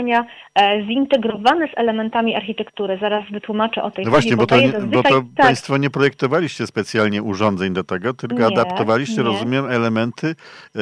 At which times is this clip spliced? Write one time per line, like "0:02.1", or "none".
0:03.9

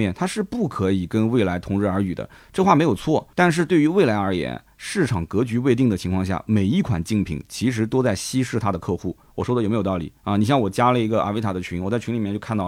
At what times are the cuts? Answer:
0:03.3
0:10.2

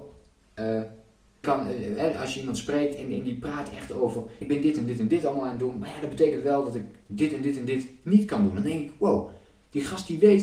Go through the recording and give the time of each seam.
0:01.4
0:04.4

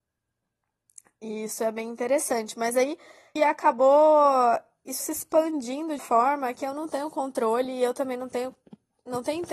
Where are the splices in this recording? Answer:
0:03.4
0:05.0
0:06.0

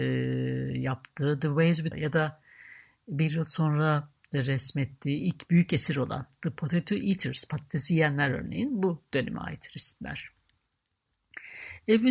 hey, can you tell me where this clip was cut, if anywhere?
0:01.9

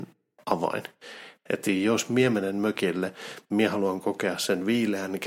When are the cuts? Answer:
none

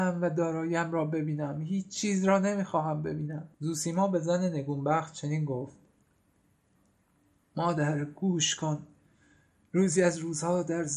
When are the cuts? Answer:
0:03.5

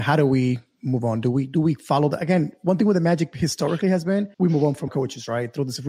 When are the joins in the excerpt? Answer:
0:04.3
0:04.9

